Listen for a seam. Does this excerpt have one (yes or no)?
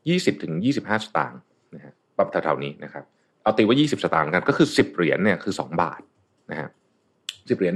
no